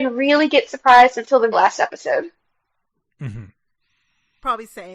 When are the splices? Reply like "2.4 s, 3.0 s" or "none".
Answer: 1.5 s